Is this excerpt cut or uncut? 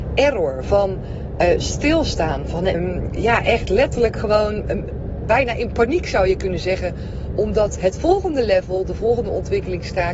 cut